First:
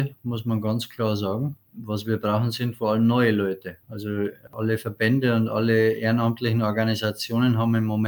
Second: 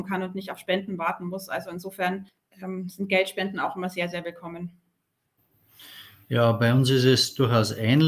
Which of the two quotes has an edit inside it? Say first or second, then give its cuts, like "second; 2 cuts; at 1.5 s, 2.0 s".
first; 1 cut; at 3.8 s